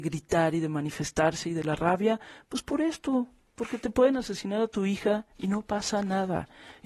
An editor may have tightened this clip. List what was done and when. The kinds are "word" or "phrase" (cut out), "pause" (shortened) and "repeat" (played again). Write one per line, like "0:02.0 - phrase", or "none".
none